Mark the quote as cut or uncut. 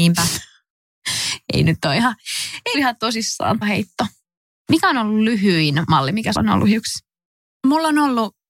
cut